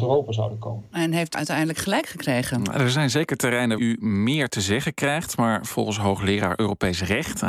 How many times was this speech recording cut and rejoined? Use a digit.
2